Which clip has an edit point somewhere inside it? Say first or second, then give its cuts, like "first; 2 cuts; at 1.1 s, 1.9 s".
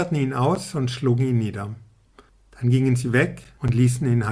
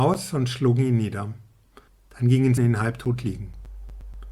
second; 1 cut; at 2.6 s